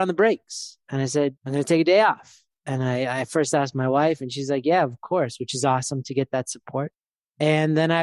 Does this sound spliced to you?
yes; 1 cut; at 1.4 s

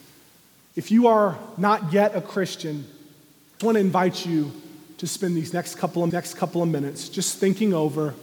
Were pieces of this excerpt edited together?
yes; 2 cuts; at 3.6 s, 6.1 s

